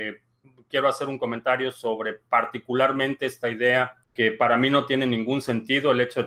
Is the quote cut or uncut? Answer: cut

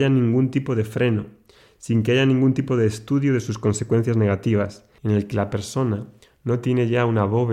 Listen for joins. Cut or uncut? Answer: uncut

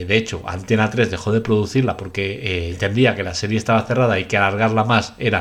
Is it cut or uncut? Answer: cut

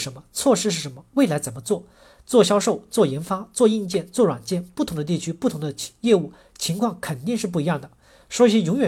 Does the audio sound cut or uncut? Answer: uncut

